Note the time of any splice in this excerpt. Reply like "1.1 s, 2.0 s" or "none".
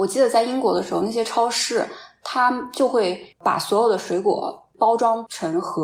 3.3 s